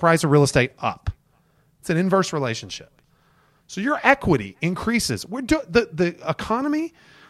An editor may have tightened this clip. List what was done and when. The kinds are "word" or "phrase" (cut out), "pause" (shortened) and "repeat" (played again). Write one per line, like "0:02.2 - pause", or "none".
none